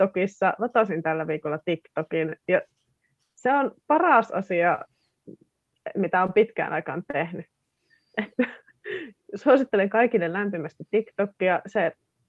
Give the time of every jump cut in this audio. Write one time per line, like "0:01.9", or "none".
none